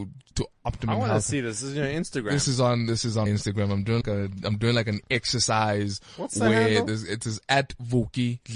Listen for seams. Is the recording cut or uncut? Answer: cut